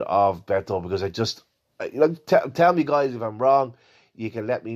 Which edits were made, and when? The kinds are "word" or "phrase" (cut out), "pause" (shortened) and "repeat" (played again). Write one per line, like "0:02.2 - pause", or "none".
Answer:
none